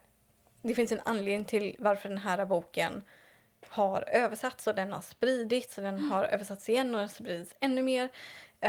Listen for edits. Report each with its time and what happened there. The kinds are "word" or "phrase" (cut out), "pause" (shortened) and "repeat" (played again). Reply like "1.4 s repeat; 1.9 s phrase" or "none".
none